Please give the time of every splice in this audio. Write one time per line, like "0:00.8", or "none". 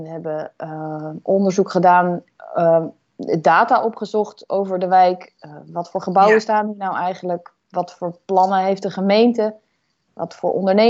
0:07.6

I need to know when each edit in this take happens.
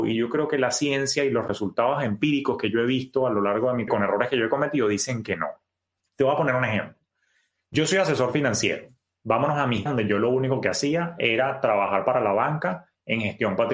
0:03.9
0:09.9

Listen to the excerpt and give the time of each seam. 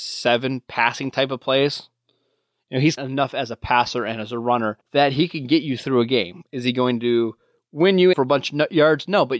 0:03.0
0:04.8
0:08.1

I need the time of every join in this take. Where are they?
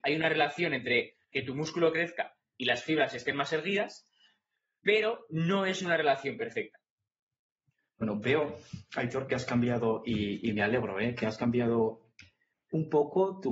none

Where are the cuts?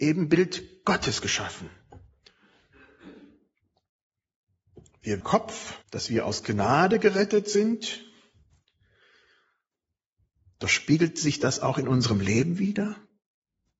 0:05.2
0:05.8

